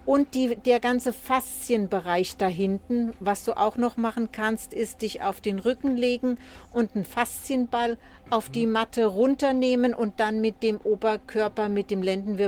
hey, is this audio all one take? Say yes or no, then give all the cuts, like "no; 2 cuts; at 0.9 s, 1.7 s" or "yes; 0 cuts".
yes; 0 cuts